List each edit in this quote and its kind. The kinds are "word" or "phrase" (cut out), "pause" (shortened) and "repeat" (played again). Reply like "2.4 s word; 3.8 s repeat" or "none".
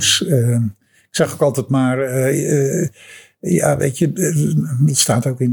none